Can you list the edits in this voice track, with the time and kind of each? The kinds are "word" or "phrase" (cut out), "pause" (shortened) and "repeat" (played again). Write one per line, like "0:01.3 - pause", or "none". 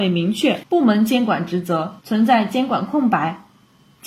0:02.0 - pause